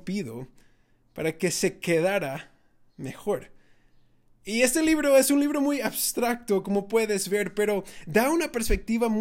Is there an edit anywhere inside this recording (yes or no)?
no